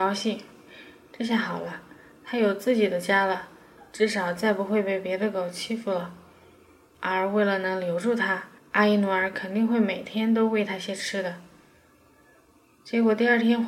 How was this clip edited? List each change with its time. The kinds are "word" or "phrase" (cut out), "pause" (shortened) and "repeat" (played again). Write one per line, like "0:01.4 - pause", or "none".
0:08.6 - pause